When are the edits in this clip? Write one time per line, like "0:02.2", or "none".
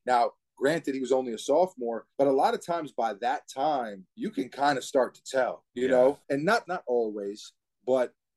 0:02.1
0:04.1
0:05.7
0:06.2
0:06.7